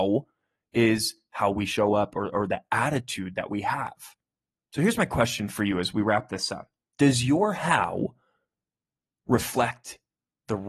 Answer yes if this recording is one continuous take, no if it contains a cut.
no